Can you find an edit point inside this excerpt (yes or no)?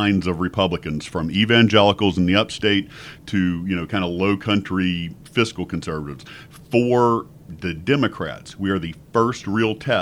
no